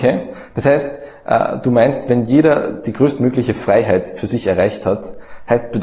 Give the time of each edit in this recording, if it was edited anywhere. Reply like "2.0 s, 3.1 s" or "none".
none